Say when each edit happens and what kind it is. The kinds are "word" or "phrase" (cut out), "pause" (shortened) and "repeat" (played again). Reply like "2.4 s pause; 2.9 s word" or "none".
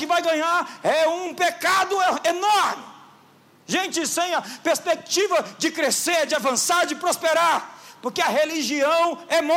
none